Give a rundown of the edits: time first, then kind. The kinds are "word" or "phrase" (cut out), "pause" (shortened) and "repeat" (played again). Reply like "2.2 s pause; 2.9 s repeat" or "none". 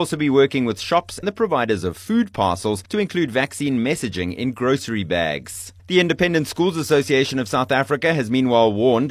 1.2 s word; 5.8 s pause